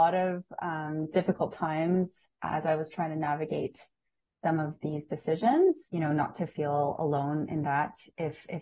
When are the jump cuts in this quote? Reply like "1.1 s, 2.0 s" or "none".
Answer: 5.9 s